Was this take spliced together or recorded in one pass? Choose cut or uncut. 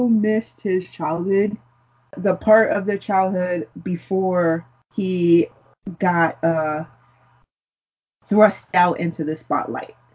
uncut